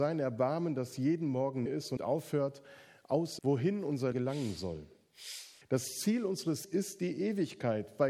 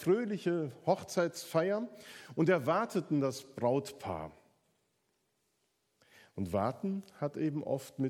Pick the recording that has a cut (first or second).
first